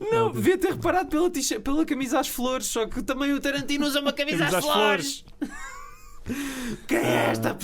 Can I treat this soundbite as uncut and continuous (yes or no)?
yes